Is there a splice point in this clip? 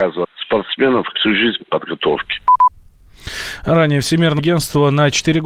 yes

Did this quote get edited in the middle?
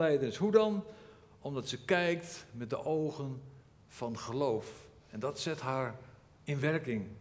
no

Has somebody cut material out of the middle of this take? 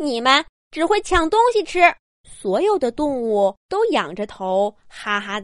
yes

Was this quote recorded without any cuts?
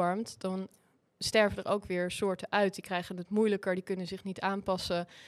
yes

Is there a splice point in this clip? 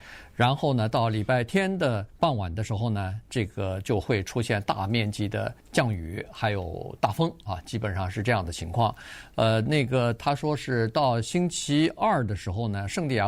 yes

